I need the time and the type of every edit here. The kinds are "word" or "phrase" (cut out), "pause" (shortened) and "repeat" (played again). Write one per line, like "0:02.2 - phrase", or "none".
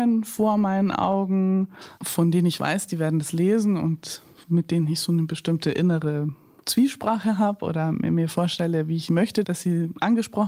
none